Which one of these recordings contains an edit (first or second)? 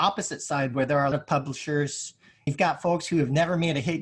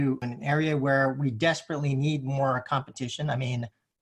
first